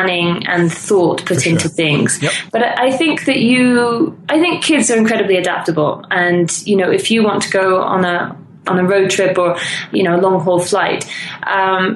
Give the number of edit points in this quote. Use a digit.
1